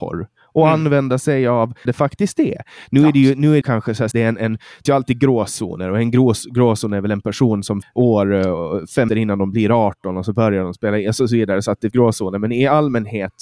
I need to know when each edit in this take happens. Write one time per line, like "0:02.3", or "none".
0:01.9
0:03.6
0:04.1
0:04.9
0:07.8
0:09.1
0:11.9